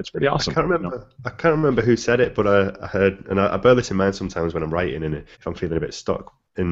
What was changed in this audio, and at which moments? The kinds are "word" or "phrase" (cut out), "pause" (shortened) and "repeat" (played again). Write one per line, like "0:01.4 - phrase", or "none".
0:01.1 - pause
0:05.3 - pause